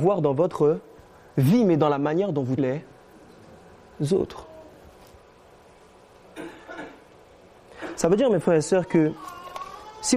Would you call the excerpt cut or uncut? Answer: cut